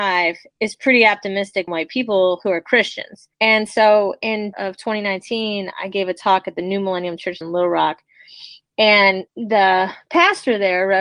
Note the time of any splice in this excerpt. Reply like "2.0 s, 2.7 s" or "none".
1.7 s, 3.3 s, 4.5 s, 7.4 s, 9.3 s

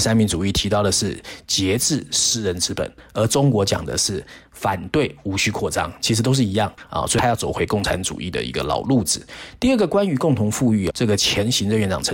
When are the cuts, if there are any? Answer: 10.9 s

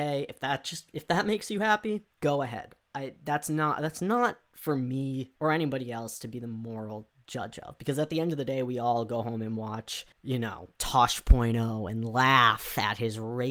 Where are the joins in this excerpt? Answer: 2.1 s, 5.4 s, 10.1 s, 10.7 s

